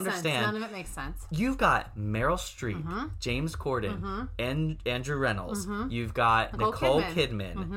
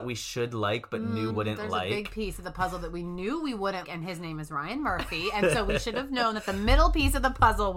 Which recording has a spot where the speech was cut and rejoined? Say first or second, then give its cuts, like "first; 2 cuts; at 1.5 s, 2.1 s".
second; 2 cuts; at 1.3 s, 3.8 s